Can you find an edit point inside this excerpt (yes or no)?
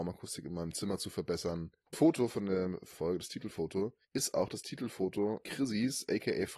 yes